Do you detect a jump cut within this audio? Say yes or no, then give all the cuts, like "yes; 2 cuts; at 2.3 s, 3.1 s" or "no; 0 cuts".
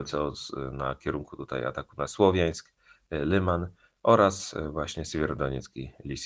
no; 0 cuts